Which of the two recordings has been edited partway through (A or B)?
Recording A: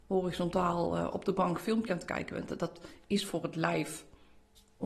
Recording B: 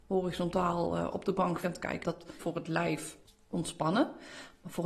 B